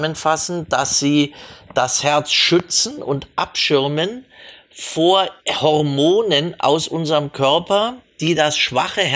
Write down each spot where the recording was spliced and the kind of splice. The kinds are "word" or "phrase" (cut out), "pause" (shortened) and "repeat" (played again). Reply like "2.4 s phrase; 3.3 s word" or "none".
5.4 s pause